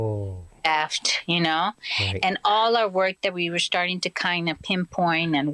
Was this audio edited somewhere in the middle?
no; 0 cuts

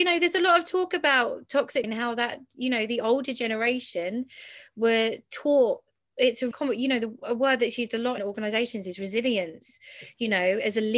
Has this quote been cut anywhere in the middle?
yes; 3 cuts; at 1.8 s, 6.5 s, 8.2 s

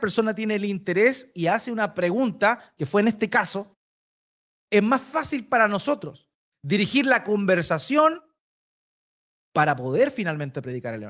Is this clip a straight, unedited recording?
yes; 0 cuts

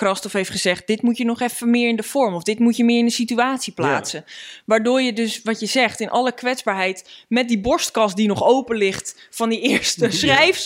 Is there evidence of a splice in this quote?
no; 0 cuts

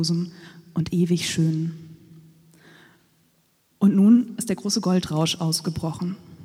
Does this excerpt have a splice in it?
no; 0 cuts

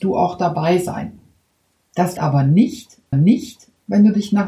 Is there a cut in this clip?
yes; 2 cuts; at 2.2 s, 3.1 s

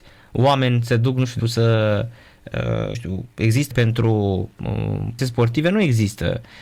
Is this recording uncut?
no; 4 cuts; at 1.4 s, 2.9 s, 3.7 s, 5.2 s

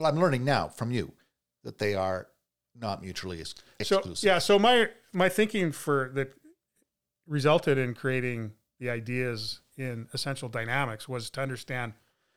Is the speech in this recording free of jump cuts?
yes; 0 cuts

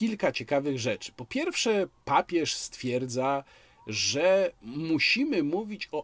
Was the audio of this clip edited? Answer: no; 0 cuts

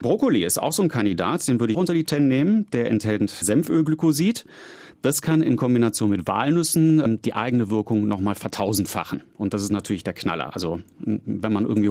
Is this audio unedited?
no; 3 cuts; at 1.7 s, 2.1 s, 3.4 s

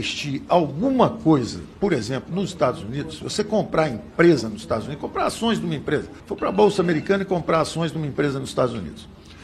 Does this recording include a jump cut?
yes; 1 cut; at 6.2 s

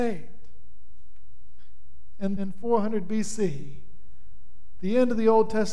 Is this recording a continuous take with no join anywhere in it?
no; 1 cut; at 2.4 s

